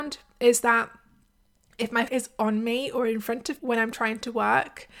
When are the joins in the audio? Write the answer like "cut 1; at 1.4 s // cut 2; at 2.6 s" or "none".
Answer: cut 1; at 2.1 s // cut 2; at 3.6 s